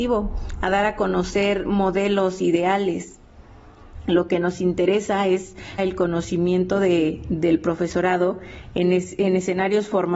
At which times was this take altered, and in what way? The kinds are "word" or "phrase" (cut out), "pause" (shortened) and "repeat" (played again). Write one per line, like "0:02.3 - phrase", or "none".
0:05.8 - phrase